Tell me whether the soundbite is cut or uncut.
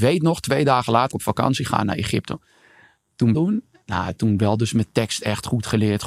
cut